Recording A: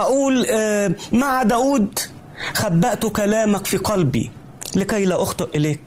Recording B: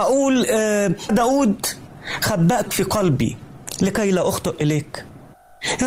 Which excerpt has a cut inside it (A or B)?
B